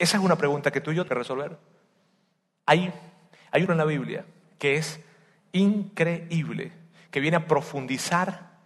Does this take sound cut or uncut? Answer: cut